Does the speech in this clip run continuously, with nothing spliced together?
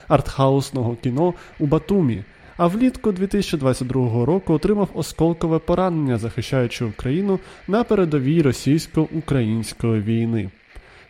yes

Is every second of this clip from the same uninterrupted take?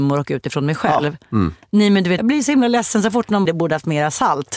no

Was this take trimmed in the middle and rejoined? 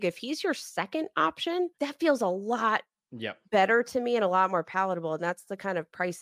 yes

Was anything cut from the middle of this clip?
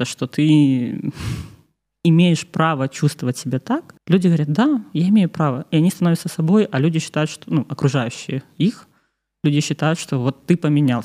yes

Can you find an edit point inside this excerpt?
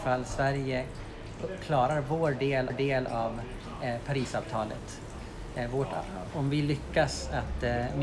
yes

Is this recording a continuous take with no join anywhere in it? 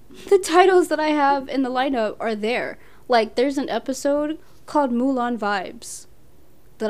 yes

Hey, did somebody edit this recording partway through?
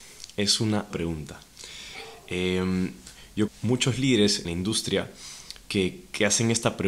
yes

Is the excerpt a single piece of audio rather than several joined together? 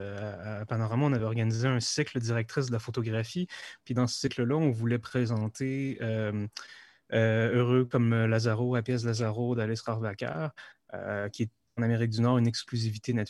yes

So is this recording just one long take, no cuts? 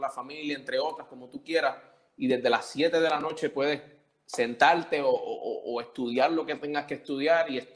yes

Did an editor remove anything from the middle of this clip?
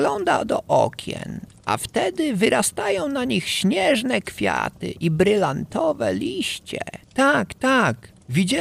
yes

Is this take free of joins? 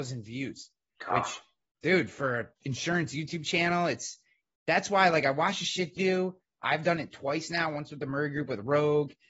no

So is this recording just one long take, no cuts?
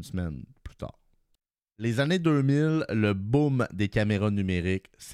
yes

